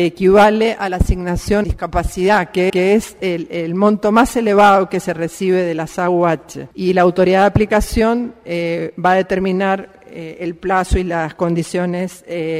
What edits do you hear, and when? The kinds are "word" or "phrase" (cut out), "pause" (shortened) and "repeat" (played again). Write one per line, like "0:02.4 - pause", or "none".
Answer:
0:01.6 - phrase
0:02.7 - repeat
0:06.7 - pause